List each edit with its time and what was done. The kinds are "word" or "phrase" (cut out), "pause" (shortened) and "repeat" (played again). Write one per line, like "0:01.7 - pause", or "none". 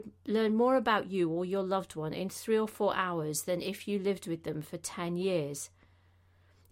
none